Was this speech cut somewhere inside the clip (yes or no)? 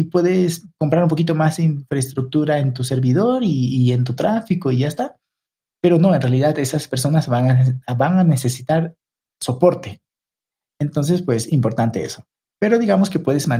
no